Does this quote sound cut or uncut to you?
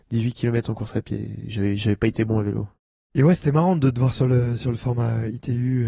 uncut